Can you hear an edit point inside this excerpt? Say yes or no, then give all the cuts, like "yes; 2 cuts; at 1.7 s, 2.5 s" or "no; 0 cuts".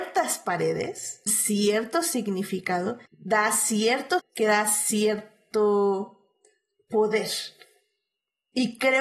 yes; 3 cuts; at 1.3 s, 3.1 s, 4.2 s